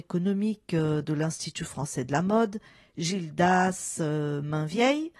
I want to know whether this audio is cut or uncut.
uncut